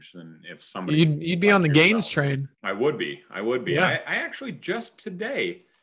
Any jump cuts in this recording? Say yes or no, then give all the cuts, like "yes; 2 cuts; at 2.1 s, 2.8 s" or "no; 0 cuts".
yes; 1 cut; at 2.5 s